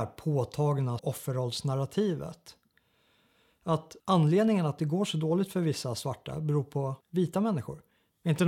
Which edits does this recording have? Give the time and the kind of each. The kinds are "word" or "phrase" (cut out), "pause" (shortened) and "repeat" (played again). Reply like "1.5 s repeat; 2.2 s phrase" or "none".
1.0 s word; 4.0 s pause; 7.0 s pause